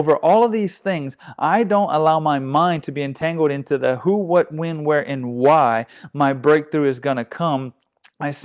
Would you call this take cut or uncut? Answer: uncut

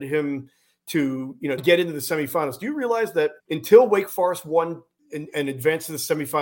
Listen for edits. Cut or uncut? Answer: cut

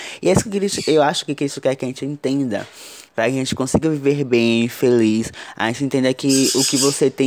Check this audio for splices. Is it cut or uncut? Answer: uncut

